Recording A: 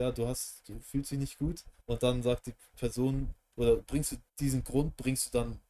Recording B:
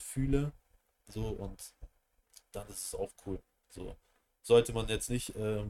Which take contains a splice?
A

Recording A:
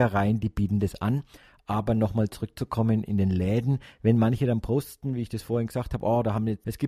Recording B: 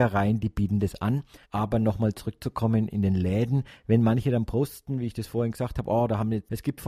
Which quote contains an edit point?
B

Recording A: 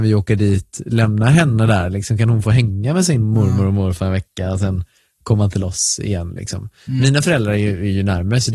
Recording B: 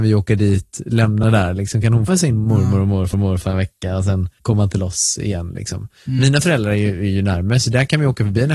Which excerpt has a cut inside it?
B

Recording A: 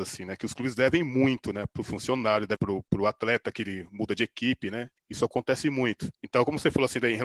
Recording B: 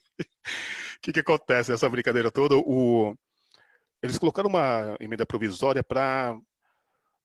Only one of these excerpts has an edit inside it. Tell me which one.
A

